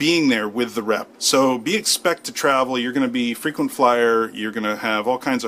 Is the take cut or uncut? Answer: cut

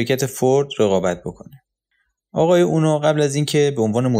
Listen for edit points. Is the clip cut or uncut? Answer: uncut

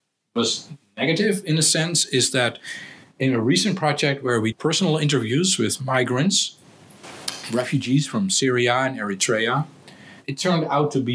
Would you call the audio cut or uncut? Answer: cut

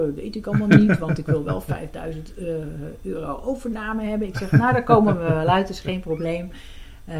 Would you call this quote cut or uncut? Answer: uncut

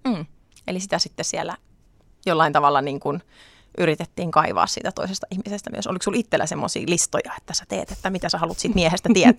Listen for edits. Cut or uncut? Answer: uncut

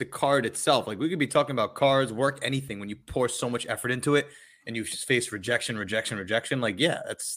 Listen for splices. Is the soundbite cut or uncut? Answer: uncut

